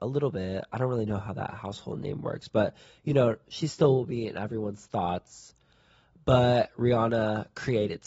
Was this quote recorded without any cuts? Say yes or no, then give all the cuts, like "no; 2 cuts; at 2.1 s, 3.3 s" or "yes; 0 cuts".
yes; 0 cuts